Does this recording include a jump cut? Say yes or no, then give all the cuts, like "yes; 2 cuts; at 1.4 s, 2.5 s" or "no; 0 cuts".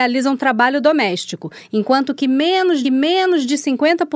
yes; 1 cut; at 2.8 s